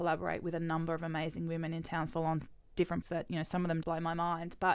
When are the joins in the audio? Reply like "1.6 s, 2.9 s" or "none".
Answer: 3.0 s, 3.8 s